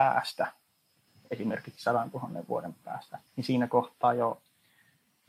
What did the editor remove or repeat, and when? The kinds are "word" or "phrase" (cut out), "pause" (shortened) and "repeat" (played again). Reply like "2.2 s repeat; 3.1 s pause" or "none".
3.3 s pause